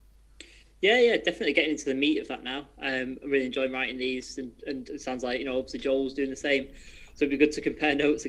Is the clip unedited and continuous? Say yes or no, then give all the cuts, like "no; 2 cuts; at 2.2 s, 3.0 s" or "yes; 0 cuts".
yes; 0 cuts